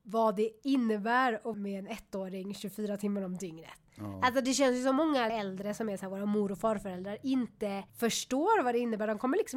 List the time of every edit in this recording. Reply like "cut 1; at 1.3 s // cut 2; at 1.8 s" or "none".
cut 1; at 1.5 s // cut 2; at 3.9 s // cut 3; at 5.3 s // cut 4; at 7.9 s